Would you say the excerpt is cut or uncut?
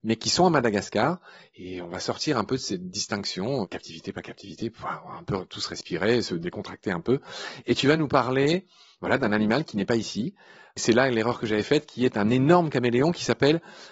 uncut